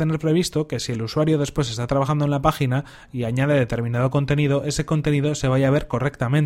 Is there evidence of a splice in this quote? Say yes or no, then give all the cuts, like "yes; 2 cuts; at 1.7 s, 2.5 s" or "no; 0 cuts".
no; 0 cuts